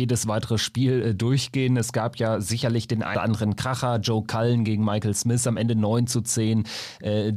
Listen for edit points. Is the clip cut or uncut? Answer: cut